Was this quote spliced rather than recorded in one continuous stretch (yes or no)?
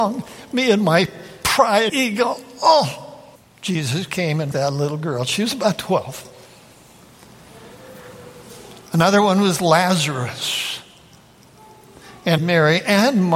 yes